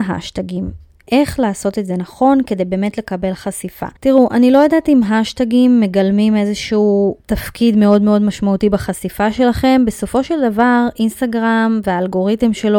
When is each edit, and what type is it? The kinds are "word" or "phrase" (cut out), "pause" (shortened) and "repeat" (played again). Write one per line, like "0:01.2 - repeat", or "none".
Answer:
0:04.0 - pause
0:07.2 - pause